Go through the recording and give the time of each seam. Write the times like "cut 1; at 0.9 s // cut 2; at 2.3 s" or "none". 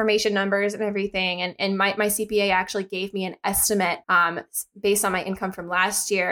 cut 1; at 4.0 s